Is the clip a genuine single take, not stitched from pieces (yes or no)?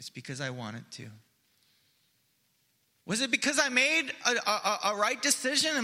yes